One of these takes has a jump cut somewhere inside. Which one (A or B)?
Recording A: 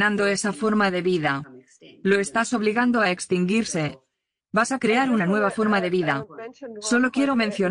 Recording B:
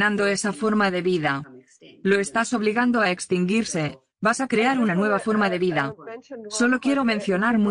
B